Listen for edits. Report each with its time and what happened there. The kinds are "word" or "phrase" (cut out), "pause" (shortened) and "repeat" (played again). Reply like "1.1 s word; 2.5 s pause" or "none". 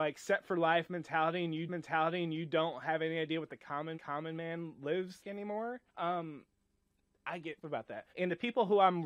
1.7 s repeat; 3.9 s repeat; 5.2 s word; 5.9 s pause; 7.6 s phrase; 8.1 s pause